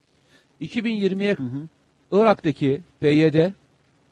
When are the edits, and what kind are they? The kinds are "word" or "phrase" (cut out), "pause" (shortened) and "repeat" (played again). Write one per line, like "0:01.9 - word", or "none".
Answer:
0:01.4 - word